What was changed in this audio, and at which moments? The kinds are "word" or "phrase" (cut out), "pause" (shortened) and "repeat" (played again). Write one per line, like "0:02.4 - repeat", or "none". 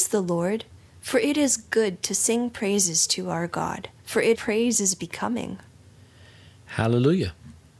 0:04.0 - pause
0:04.3 - phrase